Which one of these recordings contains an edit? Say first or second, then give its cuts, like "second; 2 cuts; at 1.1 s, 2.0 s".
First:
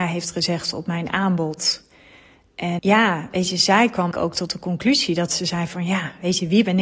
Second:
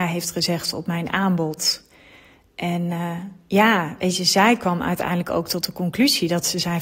first; 2 cuts; at 2.8 s, 4.1 s